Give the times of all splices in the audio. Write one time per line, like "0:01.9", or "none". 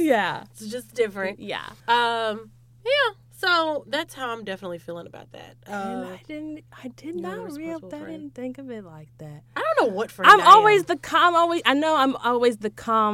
0:01.8